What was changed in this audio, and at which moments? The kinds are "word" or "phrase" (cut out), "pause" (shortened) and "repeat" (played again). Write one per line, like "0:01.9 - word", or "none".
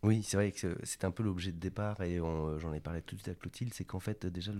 none